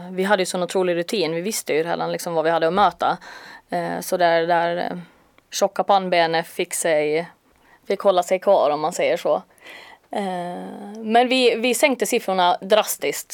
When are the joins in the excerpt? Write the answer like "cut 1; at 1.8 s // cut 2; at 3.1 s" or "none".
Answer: cut 1; at 6.5 s